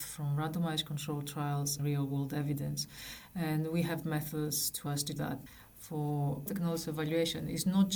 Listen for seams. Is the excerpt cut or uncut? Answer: cut